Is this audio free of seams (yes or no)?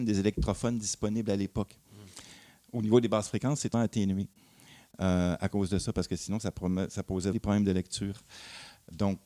no